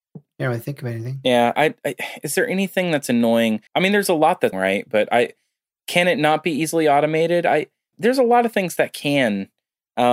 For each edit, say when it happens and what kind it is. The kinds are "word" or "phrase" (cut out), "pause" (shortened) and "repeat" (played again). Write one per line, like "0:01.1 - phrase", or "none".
0:01.5 - word
0:03.7 - pause
0:04.5 - word
0:07.9 - word